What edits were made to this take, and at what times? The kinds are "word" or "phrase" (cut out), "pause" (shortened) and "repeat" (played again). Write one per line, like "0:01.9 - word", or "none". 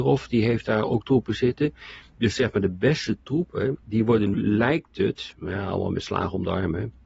0:03.8 - pause
0:04.3 - word